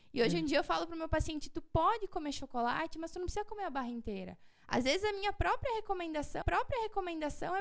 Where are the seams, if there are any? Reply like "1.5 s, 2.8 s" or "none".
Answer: 6.4 s